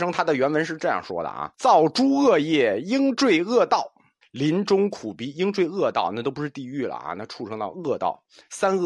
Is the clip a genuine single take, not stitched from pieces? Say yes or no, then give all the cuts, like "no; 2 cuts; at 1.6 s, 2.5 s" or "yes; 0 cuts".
no; 2 cuts; at 1.5 s, 4.2 s